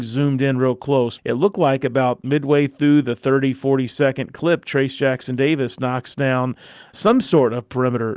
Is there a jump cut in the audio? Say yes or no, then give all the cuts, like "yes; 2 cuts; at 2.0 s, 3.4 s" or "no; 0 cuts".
yes; 2 cuts; at 1.2 s, 6.9 s